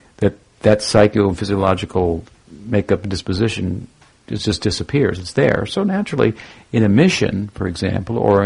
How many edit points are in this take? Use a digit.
0